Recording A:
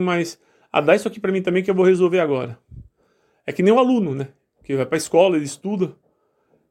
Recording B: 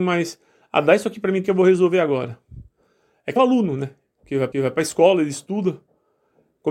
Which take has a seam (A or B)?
B